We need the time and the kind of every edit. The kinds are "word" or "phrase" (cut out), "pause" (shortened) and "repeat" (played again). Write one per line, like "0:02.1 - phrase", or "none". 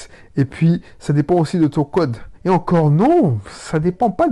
0:02.3 - pause